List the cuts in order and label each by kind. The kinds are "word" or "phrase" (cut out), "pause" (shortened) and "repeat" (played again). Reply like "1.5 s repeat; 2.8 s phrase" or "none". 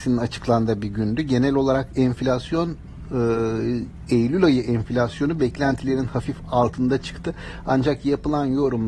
none